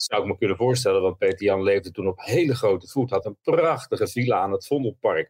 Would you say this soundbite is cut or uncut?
uncut